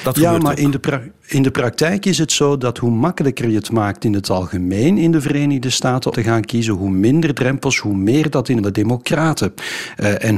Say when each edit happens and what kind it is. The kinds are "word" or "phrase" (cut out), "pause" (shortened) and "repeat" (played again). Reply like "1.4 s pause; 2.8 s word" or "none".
6.1 s word; 8.6 s phrase